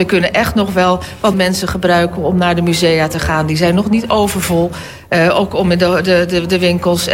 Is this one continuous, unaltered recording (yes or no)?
no